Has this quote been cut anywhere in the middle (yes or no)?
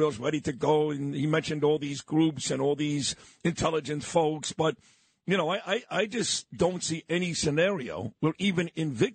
no